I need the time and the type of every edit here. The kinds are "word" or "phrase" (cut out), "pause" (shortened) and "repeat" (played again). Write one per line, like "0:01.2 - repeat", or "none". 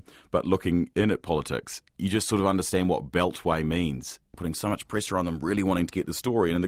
0:04.3 - pause